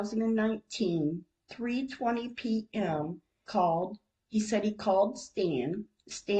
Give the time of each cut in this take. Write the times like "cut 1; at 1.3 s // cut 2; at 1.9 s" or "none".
cut 1; at 3.5 s